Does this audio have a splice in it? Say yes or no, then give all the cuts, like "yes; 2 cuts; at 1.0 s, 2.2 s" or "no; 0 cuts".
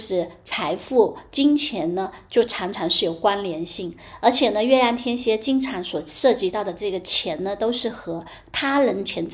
no; 0 cuts